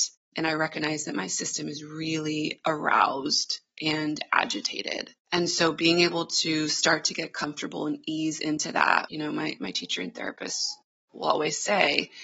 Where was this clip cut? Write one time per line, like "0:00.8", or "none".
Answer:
0:05.2
0:09.1
0:09.6